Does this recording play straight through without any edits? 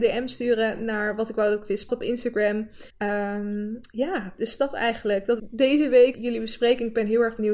no; 4 cuts; at 1.9 s, 2.9 s, 5.4 s, 6.1 s

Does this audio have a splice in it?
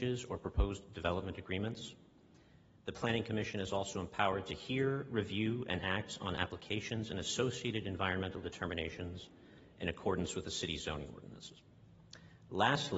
no; 0 cuts

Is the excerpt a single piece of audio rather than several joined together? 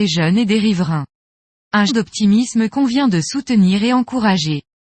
no; 2 cuts; at 1.9 s, 2.7 s

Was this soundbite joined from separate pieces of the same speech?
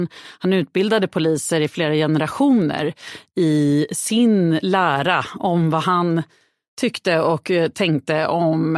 no; 0 cuts

